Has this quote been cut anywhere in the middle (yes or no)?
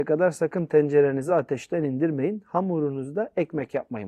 no